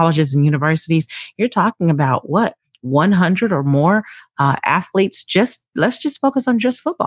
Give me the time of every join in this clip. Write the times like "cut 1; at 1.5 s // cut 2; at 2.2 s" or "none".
none